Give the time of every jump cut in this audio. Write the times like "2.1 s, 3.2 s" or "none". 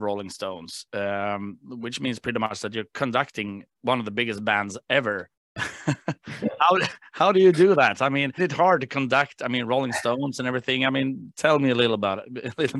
5.3 s, 8.4 s

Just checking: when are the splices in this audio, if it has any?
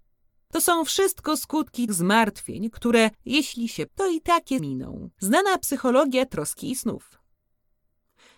1.9 s, 3.1 s, 3.9 s, 4.6 s, 5.1 s

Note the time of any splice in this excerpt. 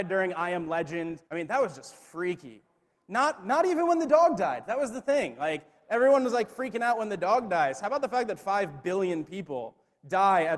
1.3 s

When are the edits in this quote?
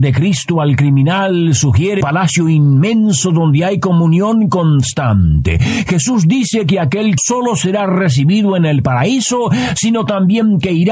2.0 s, 7.2 s

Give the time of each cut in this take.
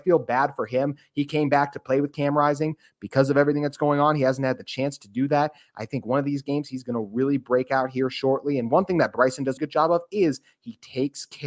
9.6 s

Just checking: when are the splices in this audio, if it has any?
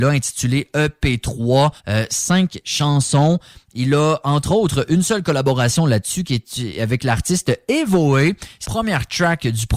1.8 s, 8.6 s

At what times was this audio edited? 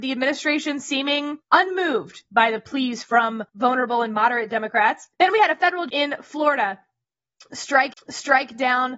1.4 s, 3.5 s, 5.1 s, 5.9 s, 7.9 s

